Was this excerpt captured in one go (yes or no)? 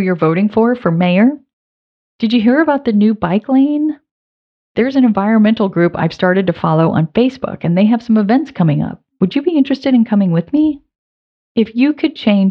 yes